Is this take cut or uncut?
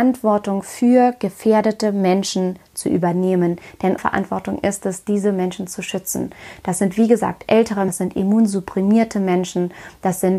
cut